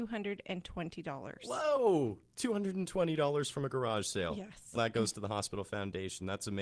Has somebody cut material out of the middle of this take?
yes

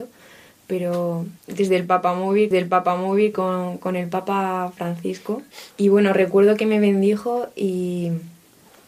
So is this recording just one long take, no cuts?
no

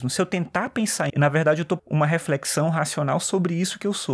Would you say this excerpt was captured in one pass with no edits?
no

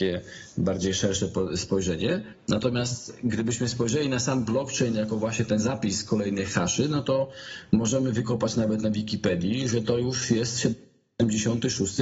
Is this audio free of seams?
yes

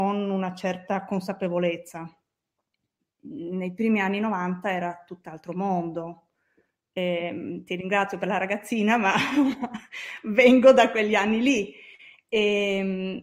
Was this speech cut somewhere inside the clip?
no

